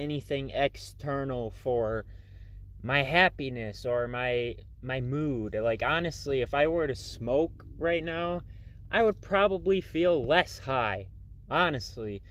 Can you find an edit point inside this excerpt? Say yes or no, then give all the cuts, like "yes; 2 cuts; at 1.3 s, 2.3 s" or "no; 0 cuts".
no; 0 cuts